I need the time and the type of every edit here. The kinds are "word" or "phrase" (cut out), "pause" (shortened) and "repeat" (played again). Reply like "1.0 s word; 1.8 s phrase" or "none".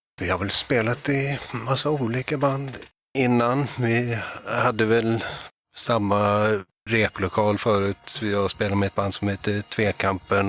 none